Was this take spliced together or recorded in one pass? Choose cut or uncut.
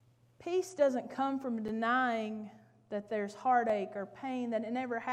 uncut